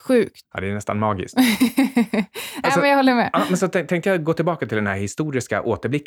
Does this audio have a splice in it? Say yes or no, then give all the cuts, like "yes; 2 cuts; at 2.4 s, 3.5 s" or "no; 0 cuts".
no; 0 cuts